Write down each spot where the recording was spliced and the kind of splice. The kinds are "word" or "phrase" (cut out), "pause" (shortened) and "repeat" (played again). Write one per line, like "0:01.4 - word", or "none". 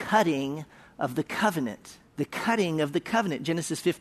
0:02.1 - pause